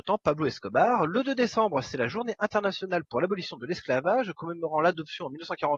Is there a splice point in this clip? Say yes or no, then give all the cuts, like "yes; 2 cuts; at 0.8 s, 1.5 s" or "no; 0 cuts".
no; 0 cuts